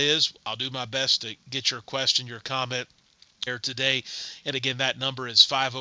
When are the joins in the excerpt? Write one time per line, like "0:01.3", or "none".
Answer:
0:03.5